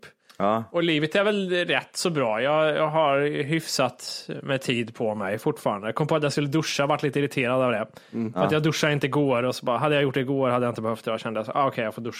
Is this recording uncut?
yes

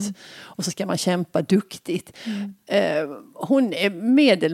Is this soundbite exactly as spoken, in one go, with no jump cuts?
yes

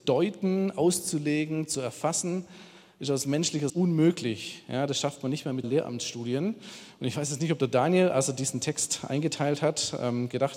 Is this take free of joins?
no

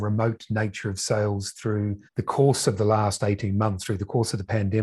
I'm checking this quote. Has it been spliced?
yes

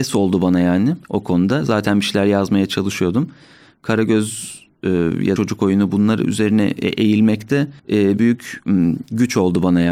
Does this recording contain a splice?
yes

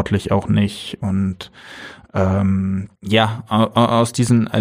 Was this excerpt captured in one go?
no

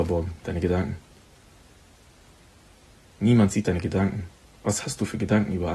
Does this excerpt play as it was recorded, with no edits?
yes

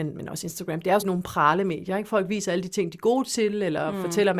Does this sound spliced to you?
yes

